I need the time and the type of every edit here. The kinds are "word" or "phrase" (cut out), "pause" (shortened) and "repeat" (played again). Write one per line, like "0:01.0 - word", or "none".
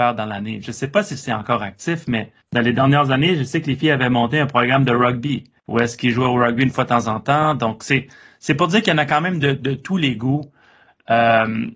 0:02.4 - pause
0:05.6 - pause

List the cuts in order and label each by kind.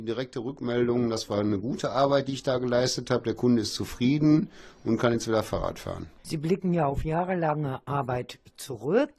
0:06.2 - pause

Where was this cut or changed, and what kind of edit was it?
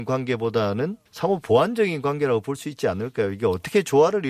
0:01.1 - pause

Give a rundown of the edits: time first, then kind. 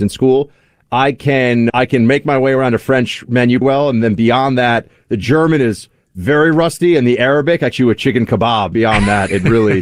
0:01.7 - word
0:03.6 - word
0:07.7 - phrase
0:08.7 - word

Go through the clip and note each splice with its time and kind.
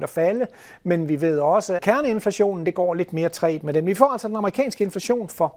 0:01.8 - phrase

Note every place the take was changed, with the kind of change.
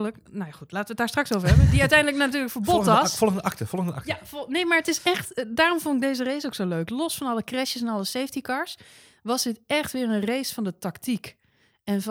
none

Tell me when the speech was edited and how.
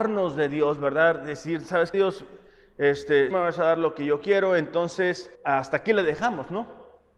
0:01.9 - word
0:03.3 - phrase
0:05.3 - pause

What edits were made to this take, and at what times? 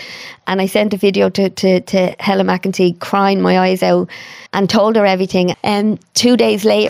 0:04.5 - pause

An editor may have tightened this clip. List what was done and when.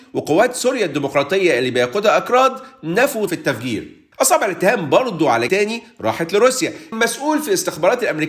0:03.3 - word
0:04.1 - pause
0:05.5 - word
0:06.9 - word

